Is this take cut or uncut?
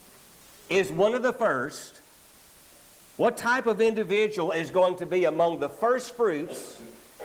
uncut